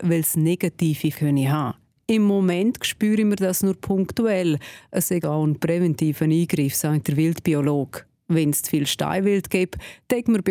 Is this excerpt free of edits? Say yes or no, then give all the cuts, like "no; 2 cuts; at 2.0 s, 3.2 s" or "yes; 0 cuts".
no; 2 cuts; at 1.1 s, 5.2 s